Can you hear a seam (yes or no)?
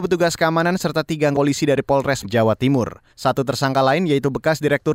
yes